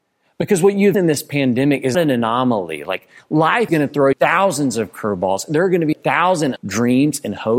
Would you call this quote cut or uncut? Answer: cut